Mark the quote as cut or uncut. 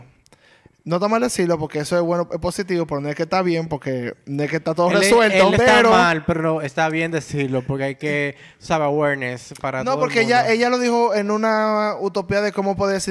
cut